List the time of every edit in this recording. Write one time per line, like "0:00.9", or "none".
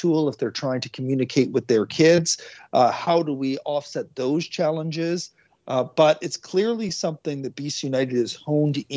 none